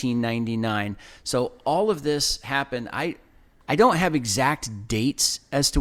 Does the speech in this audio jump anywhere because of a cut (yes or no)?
no